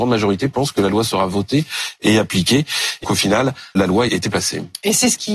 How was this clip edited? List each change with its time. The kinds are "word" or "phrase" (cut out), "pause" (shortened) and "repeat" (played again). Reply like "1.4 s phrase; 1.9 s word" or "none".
3.0 s word; 3.8 s word; 4.1 s word